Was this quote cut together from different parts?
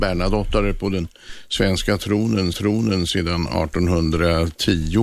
yes; 1 cut; at 2.5 s

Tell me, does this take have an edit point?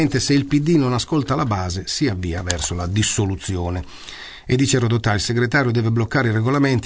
no; 0 cuts

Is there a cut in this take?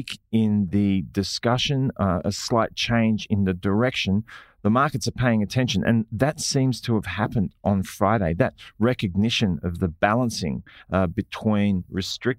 no; 0 cuts

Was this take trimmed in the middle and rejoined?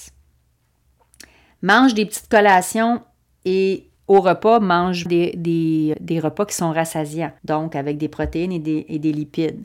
yes; 4 cuts; at 4.0 s, 5.1 s, 5.9 s, 7.4 s

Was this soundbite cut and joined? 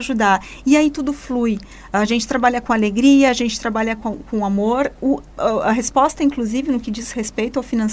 no; 0 cuts

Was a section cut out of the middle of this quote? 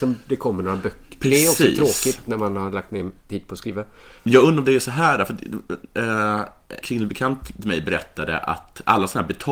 yes; 2 cuts; at 4.2 s, 6.8 s

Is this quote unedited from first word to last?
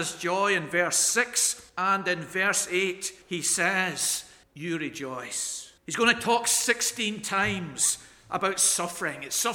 no; 4 cuts; at 1.7 s, 3.2 s, 4.4 s, 5.8 s

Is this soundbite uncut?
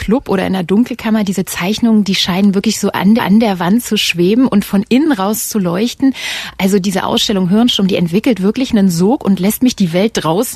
no; 1 cut; at 3.2 s

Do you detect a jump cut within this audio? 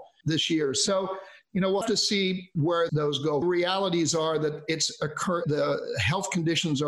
yes; 4 cuts; at 1.8 s, 2.9 s, 3.4 s, 5.4 s

